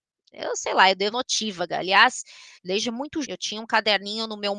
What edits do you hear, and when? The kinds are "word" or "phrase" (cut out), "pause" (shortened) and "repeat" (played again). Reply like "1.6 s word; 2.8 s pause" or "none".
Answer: 1.1 s word; 2.6 s pause; 3.2 s word